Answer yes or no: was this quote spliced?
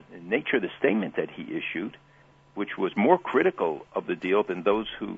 no